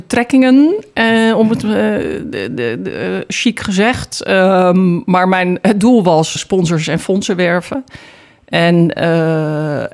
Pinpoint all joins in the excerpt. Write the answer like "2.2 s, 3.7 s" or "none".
6.4 s

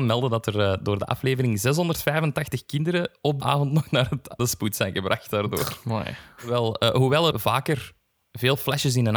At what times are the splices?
3.4 s, 4.4 s, 7.3 s

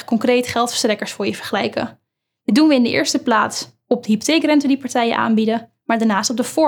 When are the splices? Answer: none

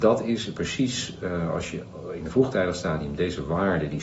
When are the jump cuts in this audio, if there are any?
none

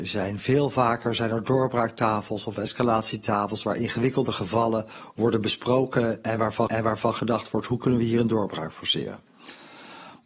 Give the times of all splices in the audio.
6.7 s

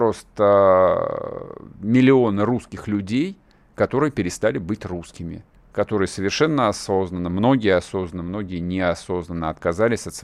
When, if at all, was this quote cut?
5.5 s

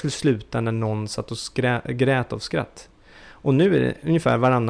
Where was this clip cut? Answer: none

